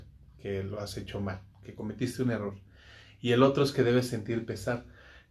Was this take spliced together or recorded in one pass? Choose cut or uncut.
uncut